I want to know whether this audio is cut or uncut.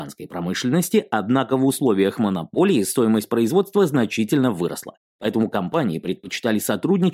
uncut